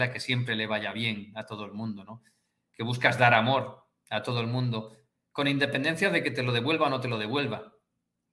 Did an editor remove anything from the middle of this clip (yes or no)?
no